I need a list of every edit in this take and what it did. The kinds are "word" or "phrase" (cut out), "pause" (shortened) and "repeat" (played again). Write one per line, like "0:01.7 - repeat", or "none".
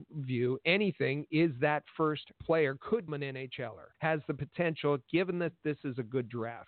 0:02.3 - phrase
0:03.1 - word
0:03.9 - pause